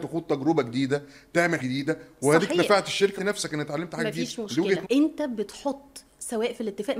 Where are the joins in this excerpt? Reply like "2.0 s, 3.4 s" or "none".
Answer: 1.6 s, 3.2 s, 4.8 s

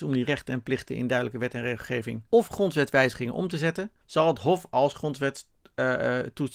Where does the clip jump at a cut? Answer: 2.3 s, 4.0 s

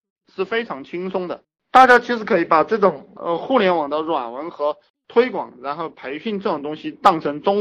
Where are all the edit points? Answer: none

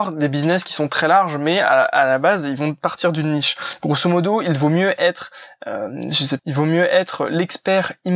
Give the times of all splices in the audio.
6.4 s

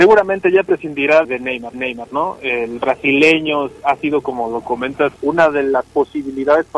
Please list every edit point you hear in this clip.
1.2 s, 1.7 s, 5.2 s

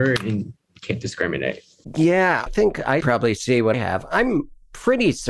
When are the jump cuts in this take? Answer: 2.5 s, 3.0 s, 3.7 s

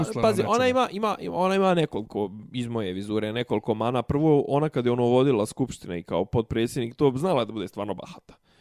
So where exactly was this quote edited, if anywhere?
none

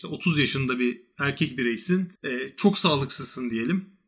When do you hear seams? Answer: 2.2 s

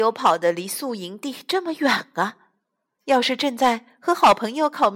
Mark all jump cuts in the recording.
2.9 s

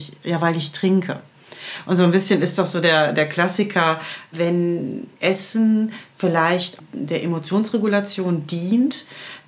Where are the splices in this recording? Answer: none

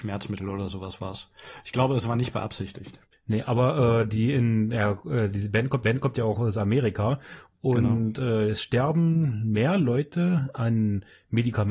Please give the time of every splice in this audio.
5.8 s

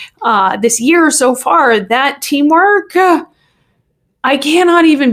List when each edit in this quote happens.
none

